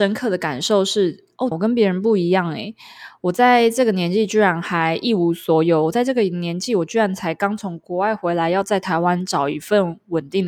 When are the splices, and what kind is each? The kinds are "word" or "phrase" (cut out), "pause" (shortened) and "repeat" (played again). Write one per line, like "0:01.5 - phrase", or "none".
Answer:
0:01.5 - phrase